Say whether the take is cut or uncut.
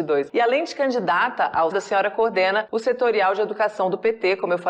cut